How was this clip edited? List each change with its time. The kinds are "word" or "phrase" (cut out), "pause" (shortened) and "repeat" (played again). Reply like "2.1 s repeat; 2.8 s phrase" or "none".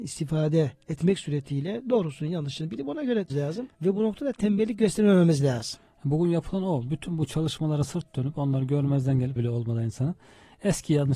3.3 s word; 3.7 s pause; 9.4 s phrase